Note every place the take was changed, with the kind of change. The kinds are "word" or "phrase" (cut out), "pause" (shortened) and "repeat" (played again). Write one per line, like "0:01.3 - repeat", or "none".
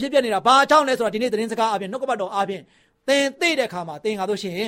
none